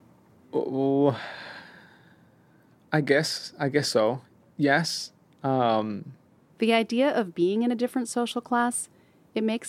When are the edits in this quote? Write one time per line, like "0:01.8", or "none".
none